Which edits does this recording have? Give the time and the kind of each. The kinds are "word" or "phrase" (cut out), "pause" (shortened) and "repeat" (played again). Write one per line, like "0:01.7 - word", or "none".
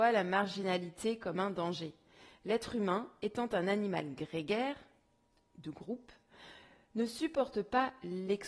none